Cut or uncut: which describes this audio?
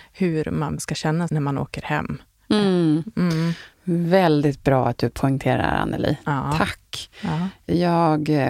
cut